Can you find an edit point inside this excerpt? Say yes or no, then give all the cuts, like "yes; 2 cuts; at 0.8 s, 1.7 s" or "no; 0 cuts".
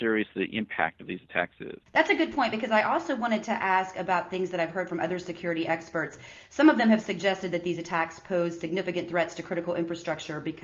yes; 1 cut; at 1.8 s